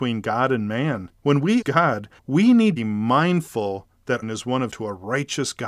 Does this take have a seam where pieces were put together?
yes; 6 cuts; at 1.2 s, 1.6 s, 2.2 s, 2.8 s, 4.2 s, 4.7 s

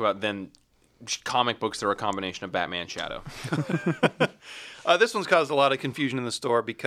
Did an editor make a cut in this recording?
no; 0 cuts

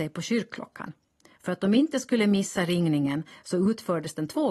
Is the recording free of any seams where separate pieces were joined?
yes; 0 cuts

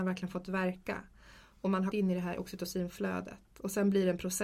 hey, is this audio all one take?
no; 1 cut; at 1.9 s

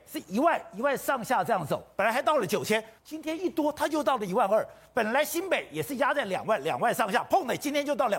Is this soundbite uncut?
no; 1 cut; at 3.0 s

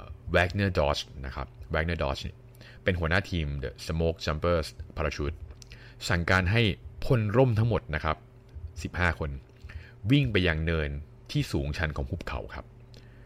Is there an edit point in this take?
no; 0 cuts

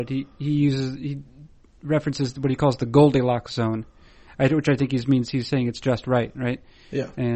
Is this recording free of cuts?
yes; 0 cuts

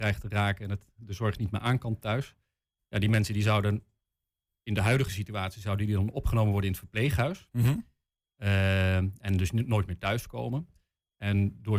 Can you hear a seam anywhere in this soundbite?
no; 0 cuts

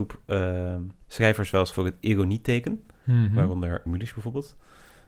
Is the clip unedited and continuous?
no; 3 cuts; at 1.0 s, 1.7 s, 3.9 s

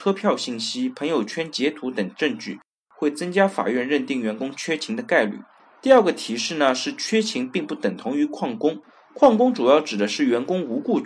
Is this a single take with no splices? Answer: no; 1 cut; at 5.6 s

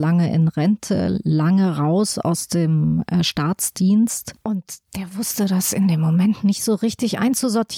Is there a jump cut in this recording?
yes; 1 cut; at 4.9 s

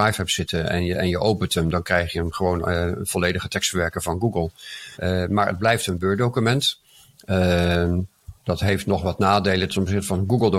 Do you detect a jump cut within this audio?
yes; 2 cuts; at 4.9 s, 8.4 s

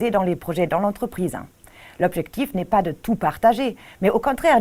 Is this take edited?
no; 0 cuts

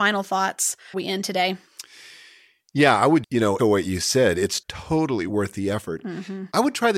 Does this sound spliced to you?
yes; 4 cuts; at 0.9 s, 3.2 s, 3.6 s, 4.6 s

